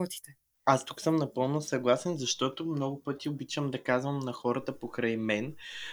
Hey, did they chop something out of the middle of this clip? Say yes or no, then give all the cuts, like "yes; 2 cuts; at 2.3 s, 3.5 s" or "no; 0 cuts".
no; 0 cuts